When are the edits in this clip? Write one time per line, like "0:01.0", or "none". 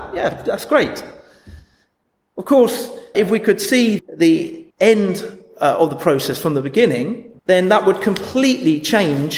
0:03.1
0:04.0
0:04.7
0:07.4